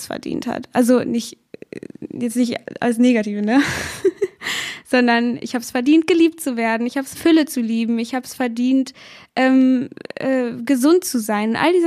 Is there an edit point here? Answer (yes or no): yes